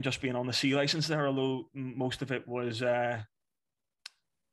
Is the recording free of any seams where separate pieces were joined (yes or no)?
yes